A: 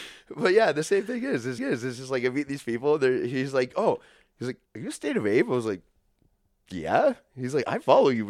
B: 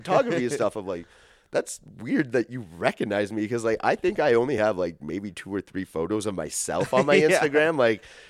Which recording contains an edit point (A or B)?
A